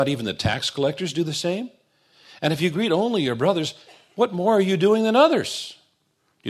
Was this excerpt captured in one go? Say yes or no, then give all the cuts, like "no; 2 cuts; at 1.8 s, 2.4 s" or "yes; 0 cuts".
yes; 0 cuts